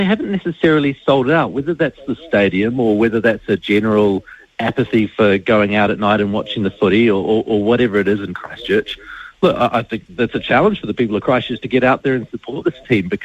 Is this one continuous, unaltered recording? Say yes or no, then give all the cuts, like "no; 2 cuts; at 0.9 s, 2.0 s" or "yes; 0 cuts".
yes; 0 cuts